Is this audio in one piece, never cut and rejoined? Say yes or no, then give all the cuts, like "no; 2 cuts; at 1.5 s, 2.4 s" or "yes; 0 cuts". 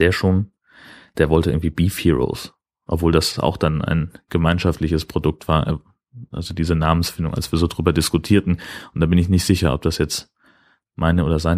yes; 0 cuts